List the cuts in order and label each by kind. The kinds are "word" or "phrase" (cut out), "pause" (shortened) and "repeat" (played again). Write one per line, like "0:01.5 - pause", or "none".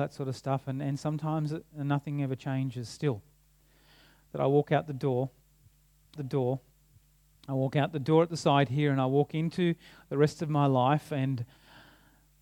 0:06.2 - repeat